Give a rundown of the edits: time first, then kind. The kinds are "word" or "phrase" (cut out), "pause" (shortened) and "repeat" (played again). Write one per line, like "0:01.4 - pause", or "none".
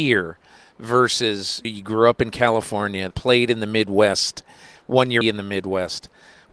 0:01.6 - word
0:03.1 - word
0:05.2 - word